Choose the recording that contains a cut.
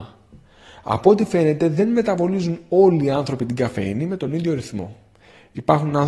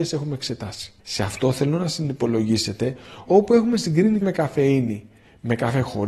second; 3 cuts; at 1.0 s, 3.3 s, 4.2 s

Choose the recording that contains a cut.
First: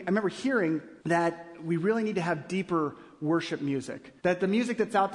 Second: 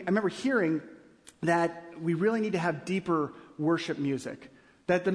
first; 2 cuts; at 1.0 s, 4.2 s

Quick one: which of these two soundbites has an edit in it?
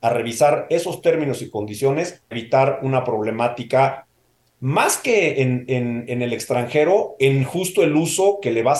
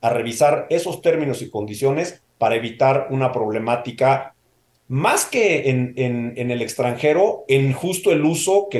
first; 1 cut; at 2.3 s

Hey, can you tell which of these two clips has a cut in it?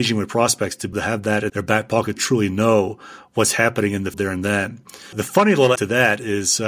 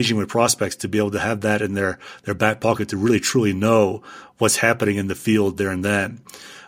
first; 6 cuts; at 0.9 s, 1.5 s, 2.2 s, 4.1 s, 5.1 s, 5.8 s

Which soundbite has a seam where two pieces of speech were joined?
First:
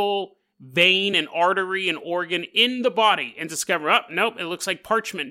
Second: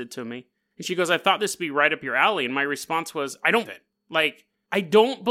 second; 1 cut; at 3.7 s

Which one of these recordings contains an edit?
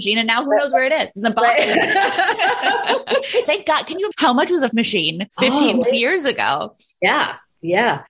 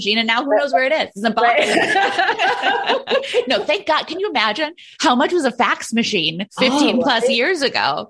first; 4 cuts; at 3.4 s, 4.1 s, 4.7 s, 5.8 s

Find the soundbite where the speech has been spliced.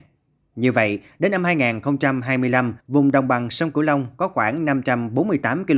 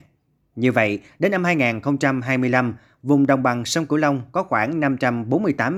first; 1 cut; at 2.8 s

